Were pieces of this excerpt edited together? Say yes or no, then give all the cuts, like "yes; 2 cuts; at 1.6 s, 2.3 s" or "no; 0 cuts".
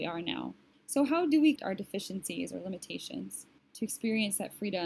yes; 1 cut; at 1.6 s